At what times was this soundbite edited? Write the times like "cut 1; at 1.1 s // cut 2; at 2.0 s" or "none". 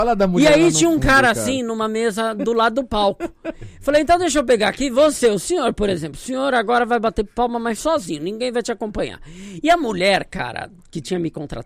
none